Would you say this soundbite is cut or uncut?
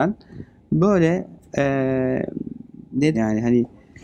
cut